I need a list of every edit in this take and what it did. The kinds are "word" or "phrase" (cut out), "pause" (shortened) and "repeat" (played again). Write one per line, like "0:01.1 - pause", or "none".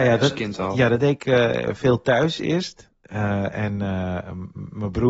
none